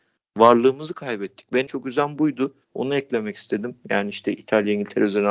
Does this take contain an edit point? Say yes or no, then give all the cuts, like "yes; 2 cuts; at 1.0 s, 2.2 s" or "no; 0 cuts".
yes; 2 cuts; at 1.7 s, 2.6 s